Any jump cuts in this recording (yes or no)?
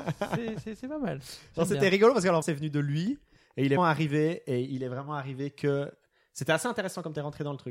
yes